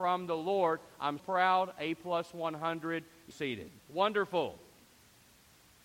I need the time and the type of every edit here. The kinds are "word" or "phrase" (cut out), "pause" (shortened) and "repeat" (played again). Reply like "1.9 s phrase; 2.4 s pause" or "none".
1.2 s word; 3.3 s phrase; 3.8 s pause

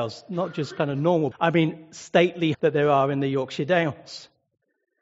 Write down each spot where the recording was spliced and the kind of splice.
1.3 s word; 2.5 s word

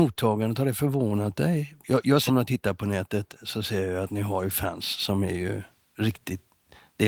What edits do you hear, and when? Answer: 2.3 s word

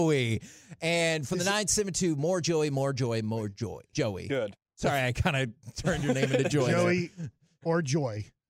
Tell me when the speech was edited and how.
3.9 s word

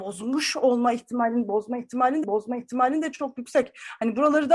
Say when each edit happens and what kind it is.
2.2 s repeat

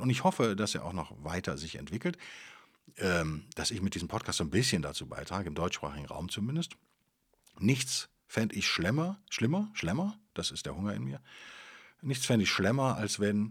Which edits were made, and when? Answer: none

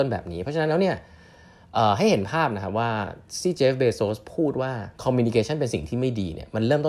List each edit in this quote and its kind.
4.9 s pause

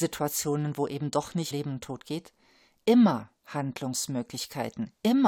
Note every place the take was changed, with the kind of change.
1.5 s word; 3.4 s pause

